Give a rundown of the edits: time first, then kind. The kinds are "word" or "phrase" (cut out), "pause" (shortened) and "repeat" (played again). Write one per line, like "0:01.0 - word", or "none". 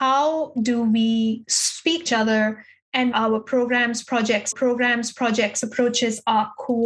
0:02.1 - word
0:03.1 - phrase
0:04.5 - repeat